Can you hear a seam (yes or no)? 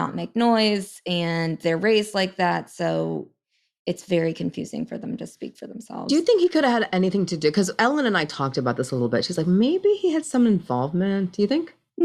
no